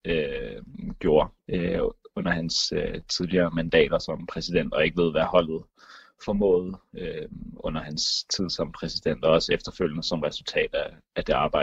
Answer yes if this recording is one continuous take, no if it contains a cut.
no